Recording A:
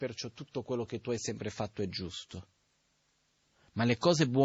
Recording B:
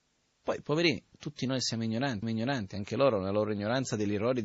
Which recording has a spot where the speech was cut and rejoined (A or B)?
B